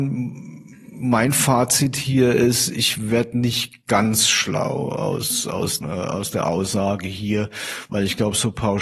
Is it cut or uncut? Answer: cut